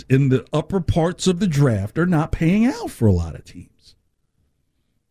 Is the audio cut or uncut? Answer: uncut